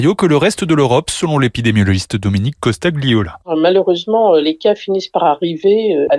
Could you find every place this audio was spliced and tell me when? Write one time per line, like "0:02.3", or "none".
none